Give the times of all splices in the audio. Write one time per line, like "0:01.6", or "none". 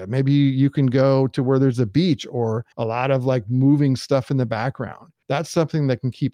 0:02.7
0:05.2